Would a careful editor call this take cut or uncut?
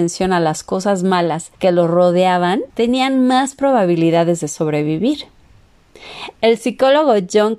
cut